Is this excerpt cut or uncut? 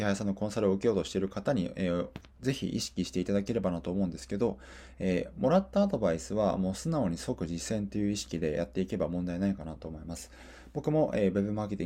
uncut